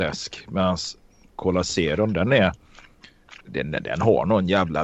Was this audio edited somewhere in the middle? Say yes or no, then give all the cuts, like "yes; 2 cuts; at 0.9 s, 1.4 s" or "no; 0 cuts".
no; 0 cuts